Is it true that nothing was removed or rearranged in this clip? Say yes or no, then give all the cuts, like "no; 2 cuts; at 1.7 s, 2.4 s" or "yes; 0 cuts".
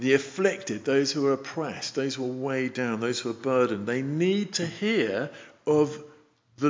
yes; 0 cuts